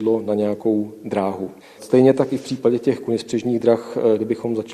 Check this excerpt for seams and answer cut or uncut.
uncut